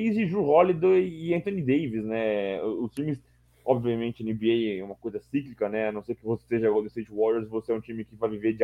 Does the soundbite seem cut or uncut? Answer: uncut